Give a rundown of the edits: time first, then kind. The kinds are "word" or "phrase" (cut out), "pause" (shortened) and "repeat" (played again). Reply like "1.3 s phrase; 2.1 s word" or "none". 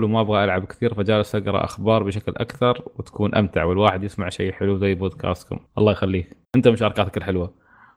5.7 s pause; 6.4 s pause